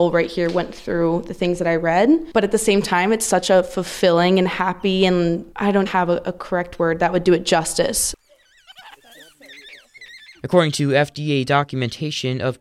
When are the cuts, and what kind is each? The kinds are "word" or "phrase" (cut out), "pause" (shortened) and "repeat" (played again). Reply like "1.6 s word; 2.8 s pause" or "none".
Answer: 5.9 s word